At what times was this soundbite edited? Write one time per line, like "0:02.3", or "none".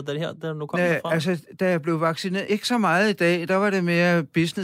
0:02.5

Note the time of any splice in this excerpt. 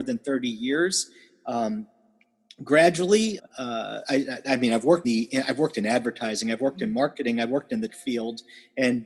0:03.4
0:05.0
0:07.9

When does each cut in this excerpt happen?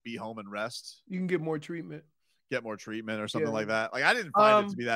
none

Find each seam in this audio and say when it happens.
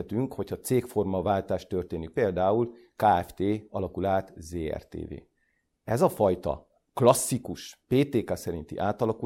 none

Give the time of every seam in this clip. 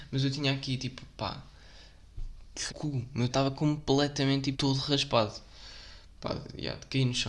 0:02.7
0:03.3
0:04.5

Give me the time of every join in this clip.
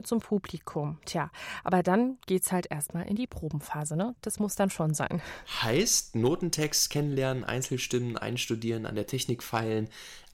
none

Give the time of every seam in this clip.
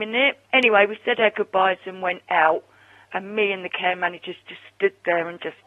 none

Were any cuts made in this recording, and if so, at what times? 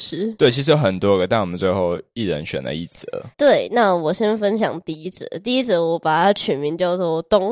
0:03.3

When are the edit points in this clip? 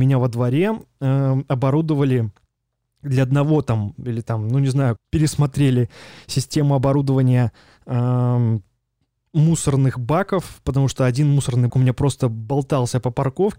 0:05.0
0:11.7

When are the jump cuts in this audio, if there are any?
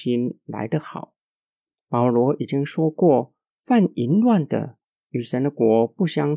none

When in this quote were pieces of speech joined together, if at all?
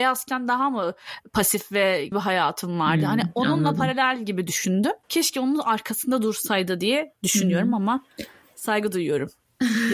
0:02.1
0:05.0

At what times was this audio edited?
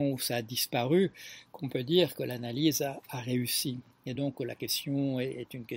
none

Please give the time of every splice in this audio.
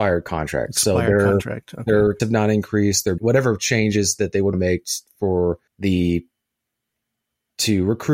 0:02.2
0:03.2
0:04.5
0:05.7

